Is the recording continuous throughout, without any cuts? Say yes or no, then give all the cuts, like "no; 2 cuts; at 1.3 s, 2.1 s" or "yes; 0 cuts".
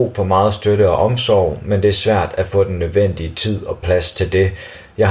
yes; 0 cuts